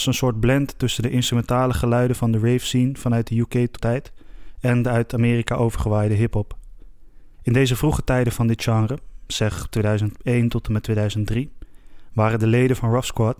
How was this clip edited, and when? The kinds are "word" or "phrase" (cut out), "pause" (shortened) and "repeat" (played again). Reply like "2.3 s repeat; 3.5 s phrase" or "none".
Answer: 3.8 s word; 7.3 s pause